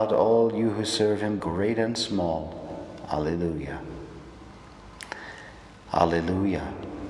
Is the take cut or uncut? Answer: cut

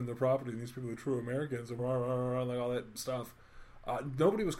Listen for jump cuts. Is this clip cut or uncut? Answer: cut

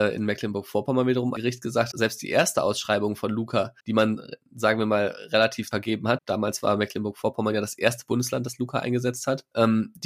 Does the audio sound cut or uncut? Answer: cut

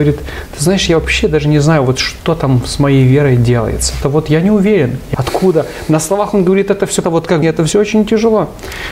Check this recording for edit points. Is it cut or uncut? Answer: cut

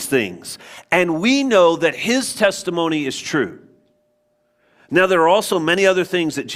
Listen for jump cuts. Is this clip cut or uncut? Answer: uncut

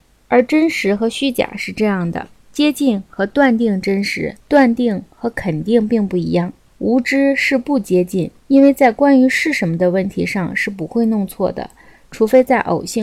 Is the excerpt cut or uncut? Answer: cut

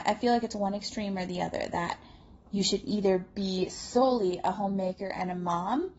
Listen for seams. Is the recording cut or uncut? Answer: uncut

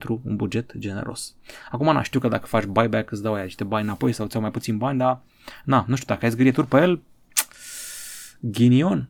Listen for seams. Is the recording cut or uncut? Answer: uncut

